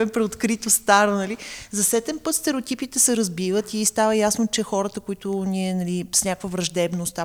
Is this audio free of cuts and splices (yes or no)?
yes